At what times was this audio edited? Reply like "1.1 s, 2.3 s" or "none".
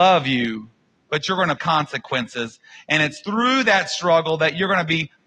1.6 s